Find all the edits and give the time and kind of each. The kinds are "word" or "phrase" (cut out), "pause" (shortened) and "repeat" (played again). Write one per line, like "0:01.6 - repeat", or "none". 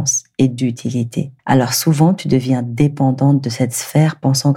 0:01.4 - pause